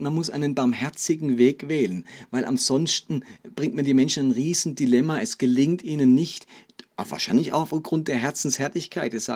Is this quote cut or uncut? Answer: uncut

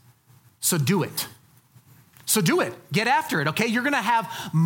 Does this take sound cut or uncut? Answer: uncut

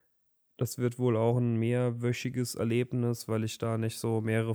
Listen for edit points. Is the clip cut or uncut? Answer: uncut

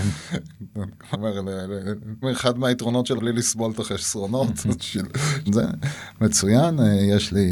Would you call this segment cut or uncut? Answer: cut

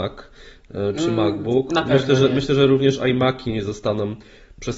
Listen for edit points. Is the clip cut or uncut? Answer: uncut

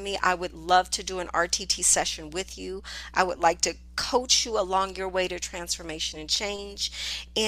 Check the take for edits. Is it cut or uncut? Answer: uncut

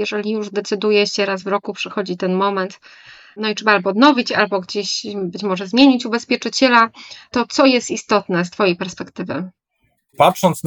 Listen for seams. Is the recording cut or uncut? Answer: uncut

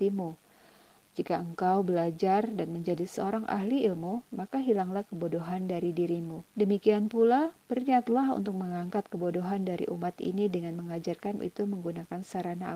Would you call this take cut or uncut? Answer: cut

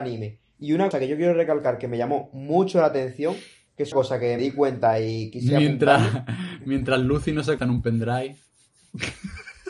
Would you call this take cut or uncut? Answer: cut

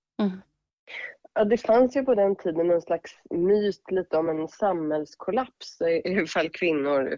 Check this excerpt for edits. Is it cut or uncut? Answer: uncut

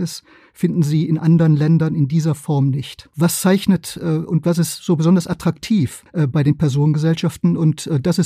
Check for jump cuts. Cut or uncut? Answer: uncut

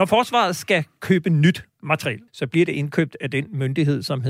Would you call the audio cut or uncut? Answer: cut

